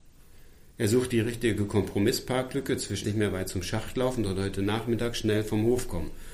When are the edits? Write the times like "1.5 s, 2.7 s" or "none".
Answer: 3.0 s